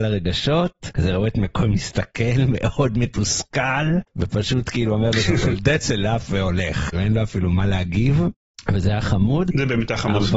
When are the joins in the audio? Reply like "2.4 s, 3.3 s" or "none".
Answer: 6.9 s